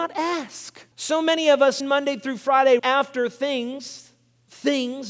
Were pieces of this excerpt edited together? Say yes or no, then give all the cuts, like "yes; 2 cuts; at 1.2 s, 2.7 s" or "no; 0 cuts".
yes; 3 cuts; at 0.9 s, 1.8 s, 2.8 s